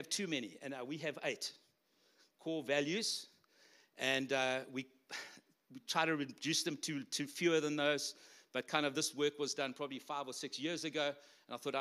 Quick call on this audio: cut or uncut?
uncut